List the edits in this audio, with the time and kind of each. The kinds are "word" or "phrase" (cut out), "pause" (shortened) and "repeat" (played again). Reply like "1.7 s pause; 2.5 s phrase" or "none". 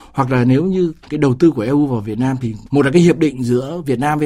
none